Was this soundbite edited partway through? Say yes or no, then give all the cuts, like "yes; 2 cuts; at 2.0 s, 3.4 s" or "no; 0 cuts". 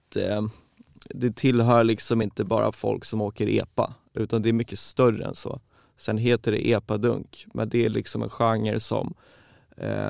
no; 0 cuts